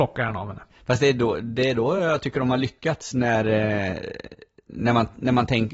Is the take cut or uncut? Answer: uncut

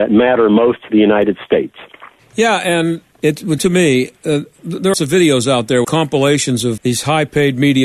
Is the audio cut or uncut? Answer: cut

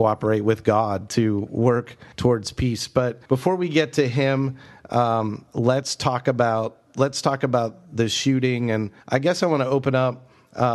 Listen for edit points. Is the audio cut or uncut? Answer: cut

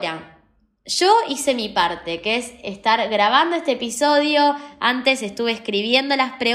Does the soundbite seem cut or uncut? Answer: uncut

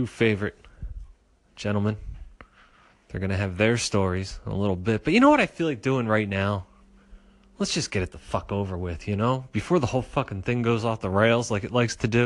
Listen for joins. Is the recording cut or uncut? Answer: uncut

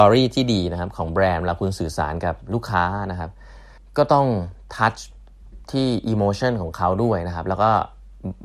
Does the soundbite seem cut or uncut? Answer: cut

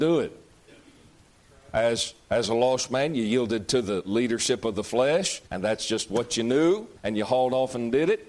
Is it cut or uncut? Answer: cut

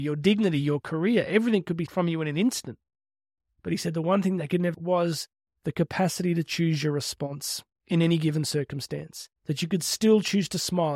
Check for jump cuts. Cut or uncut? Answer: cut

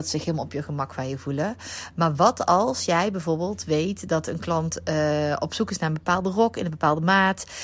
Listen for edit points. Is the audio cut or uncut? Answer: uncut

